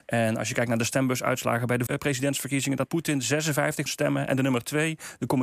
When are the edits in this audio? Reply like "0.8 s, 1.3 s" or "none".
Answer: 1.9 s, 2.8 s, 3.9 s